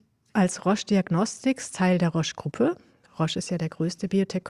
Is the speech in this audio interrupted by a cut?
no; 0 cuts

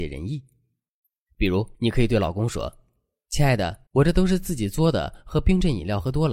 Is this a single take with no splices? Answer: no; 2 cuts; at 1.7 s, 3.9 s

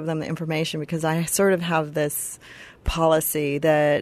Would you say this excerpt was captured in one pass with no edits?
yes; 0 cuts

